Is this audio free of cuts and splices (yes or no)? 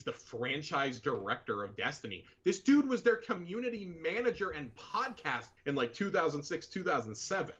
no